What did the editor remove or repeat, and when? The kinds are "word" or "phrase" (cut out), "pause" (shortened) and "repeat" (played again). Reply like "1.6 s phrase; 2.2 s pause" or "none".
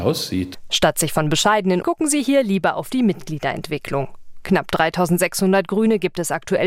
1.8 s phrase